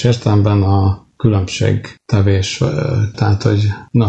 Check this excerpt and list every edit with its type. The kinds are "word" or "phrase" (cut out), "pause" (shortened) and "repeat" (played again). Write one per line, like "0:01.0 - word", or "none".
0:03.1 - word